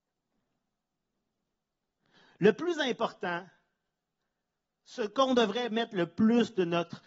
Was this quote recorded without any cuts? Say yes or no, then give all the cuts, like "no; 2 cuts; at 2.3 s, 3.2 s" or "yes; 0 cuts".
yes; 0 cuts